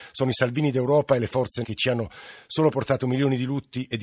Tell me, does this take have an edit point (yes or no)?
yes